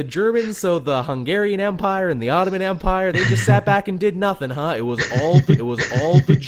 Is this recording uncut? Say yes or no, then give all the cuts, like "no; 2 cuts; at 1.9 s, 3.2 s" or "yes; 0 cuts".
no; 2 cuts; at 3.1 s, 5.6 s